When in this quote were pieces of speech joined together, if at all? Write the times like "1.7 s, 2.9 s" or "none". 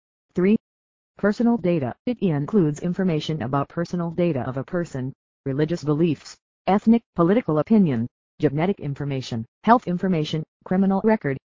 2.0 s, 3.7 s, 7.0 s, 9.5 s, 10.5 s